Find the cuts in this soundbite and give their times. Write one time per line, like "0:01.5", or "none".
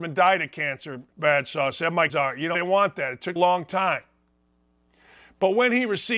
0:01.1
0:02.1
0:02.5
0:03.4